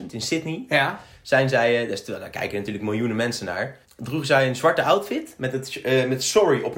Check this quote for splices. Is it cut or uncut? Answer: cut